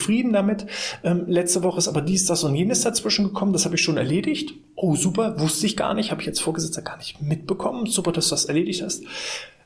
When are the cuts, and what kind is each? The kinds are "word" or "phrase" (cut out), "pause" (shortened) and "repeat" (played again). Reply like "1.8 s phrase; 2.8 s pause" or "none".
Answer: none